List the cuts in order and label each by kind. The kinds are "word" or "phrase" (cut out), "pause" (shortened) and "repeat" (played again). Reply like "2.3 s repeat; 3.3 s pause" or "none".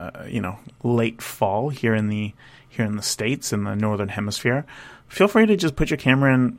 none